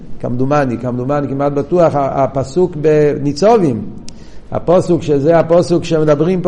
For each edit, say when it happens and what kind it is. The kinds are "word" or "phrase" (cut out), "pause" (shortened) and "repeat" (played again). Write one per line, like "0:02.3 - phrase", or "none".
none